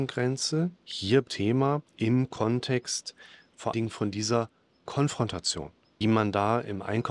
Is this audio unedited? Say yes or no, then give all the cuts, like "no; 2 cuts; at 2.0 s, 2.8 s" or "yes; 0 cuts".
no; 4 cuts; at 1.3 s, 1.9 s, 3.7 s, 6.0 s